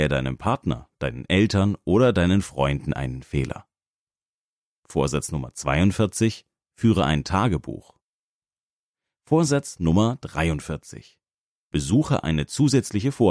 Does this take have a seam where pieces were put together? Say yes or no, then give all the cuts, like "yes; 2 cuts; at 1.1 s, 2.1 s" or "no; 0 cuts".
no; 0 cuts